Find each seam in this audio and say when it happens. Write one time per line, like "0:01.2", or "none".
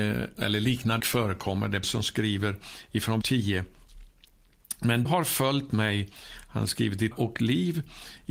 0:01.0
0:01.8
0:03.2
0:05.1
0:07.1